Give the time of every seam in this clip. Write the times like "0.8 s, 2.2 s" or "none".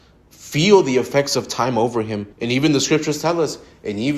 2.3 s